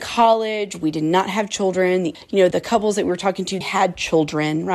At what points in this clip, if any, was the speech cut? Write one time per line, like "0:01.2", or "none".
0:02.1
0:02.5
0:03.6